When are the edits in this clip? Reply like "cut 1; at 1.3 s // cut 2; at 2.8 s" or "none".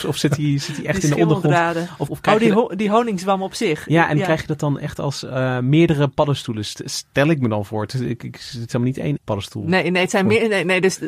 cut 1; at 2.1 s // cut 2; at 9.2 s